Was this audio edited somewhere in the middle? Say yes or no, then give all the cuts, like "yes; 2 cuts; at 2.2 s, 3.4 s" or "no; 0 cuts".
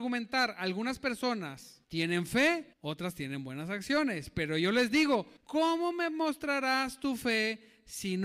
yes; 3 cuts; at 1.8 s, 2.7 s, 5.4 s